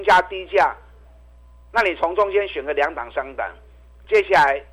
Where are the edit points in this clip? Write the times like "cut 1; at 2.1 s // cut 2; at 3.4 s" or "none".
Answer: none